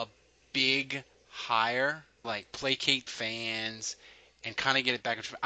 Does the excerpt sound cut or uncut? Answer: cut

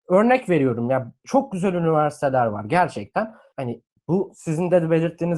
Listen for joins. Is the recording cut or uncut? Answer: cut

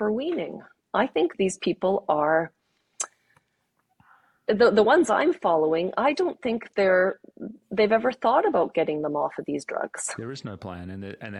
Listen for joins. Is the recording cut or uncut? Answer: uncut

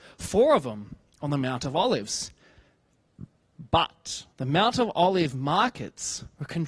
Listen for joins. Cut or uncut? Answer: cut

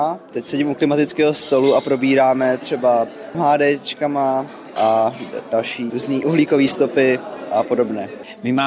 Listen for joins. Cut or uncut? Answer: cut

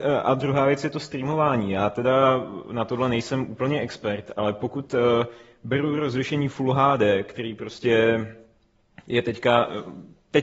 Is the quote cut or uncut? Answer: uncut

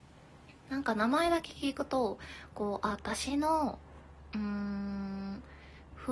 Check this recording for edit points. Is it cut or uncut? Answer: uncut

